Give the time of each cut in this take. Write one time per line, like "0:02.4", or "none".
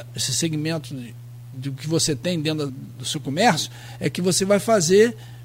0:02.7